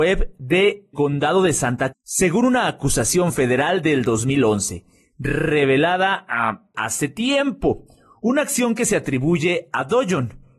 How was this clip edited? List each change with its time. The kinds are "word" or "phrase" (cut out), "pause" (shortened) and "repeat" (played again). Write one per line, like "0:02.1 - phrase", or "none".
0:00.9 - word
0:01.9 - word
0:06.7 - word